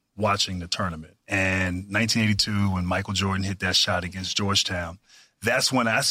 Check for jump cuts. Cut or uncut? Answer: cut